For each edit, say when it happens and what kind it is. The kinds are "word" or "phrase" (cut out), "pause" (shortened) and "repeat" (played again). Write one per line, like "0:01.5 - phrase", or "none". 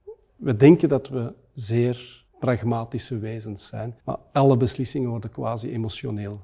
0:02.3 - pause
0:04.0 - pause